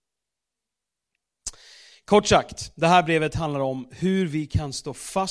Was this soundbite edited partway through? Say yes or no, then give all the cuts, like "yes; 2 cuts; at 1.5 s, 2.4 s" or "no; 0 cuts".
no; 0 cuts